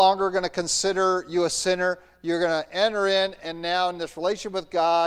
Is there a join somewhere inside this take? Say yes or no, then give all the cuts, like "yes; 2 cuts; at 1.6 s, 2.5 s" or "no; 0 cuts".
no; 0 cuts